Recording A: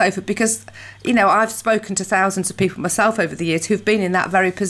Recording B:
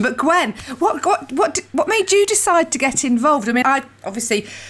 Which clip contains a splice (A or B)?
B